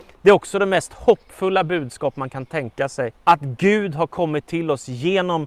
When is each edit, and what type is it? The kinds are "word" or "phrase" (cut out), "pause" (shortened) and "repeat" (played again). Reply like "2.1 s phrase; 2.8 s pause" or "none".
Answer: 3.2 s pause